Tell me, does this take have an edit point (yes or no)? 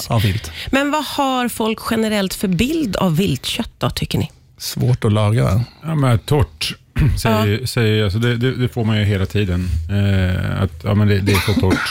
no